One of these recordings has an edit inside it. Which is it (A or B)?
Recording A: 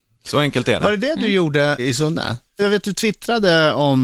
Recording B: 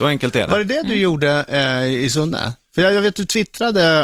A